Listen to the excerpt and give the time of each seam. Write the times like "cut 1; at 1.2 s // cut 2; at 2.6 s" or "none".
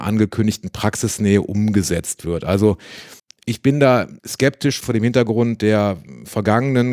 cut 1; at 3.2 s // cut 2; at 4.2 s